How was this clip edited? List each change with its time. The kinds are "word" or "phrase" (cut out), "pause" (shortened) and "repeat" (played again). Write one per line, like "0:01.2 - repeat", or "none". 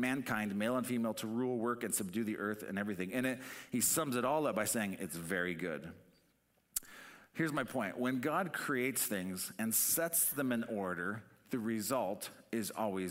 none